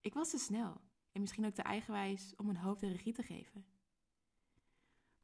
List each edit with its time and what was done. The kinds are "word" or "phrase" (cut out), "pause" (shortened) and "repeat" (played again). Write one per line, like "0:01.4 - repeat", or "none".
0:00.9 - pause